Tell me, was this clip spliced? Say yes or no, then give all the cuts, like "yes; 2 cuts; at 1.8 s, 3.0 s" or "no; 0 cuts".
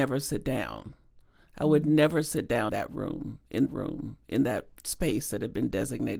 yes; 2 cuts; at 2.7 s, 3.7 s